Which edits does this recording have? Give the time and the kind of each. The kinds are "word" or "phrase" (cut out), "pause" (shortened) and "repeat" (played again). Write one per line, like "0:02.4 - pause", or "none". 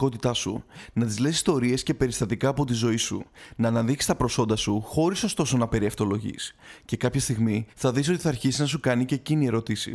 0:07.7 - pause